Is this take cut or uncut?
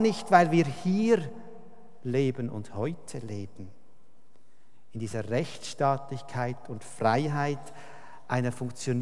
uncut